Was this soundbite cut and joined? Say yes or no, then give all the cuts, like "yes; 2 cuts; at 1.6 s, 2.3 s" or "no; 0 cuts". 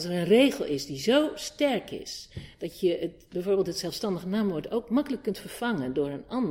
no; 0 cuts